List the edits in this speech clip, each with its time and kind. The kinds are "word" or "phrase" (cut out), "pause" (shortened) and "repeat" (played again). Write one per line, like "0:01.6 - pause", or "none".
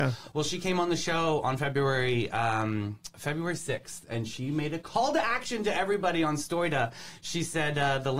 none